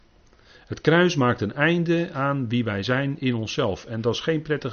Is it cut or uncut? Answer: uncut